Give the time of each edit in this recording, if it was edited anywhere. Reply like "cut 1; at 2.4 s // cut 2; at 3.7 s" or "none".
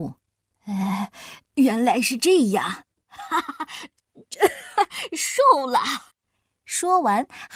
cut 1; at 1.4 s // cut 2; at 6.1 s

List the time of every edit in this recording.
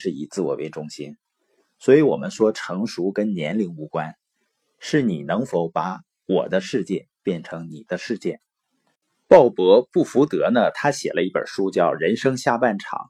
none

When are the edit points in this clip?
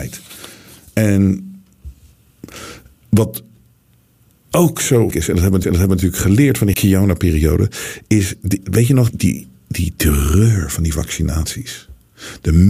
cut 1; at 5.1 s // cut 2; at 5.6 s // cut 3; at 6.7 s // cut 4; at 9.1 s

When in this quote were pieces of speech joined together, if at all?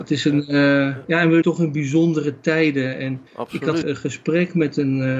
cut 1; at 1.4 s // cut 2; at 3.3 s // cut 3; at 3.8 s

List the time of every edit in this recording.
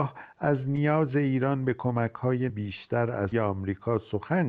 cut 1; at 2.5 s // cut 2; at 3.3 s

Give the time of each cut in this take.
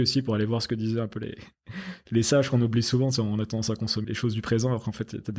cut 1; at 4.0 s

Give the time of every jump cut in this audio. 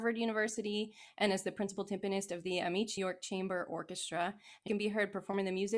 cut 1; at 3.0 s // cut 2; at 4.7 s

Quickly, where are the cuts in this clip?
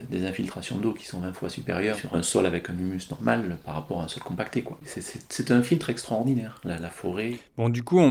none

